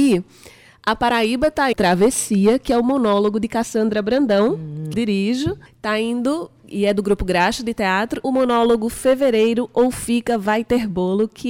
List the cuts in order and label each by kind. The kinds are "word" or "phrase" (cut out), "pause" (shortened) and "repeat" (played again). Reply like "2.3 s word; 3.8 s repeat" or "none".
1.7 s phrase; 4.9 s word; 5.7 s pause; 8.2 s phrase